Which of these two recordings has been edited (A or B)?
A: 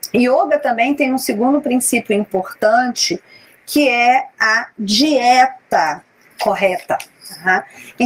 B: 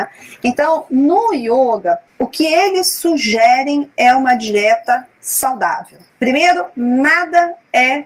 B